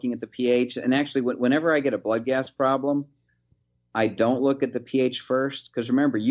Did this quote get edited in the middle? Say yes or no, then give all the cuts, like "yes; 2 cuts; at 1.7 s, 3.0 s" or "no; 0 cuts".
no; 0 cuts